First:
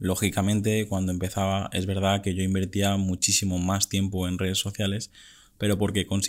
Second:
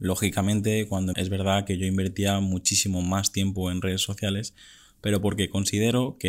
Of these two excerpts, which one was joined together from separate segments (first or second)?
second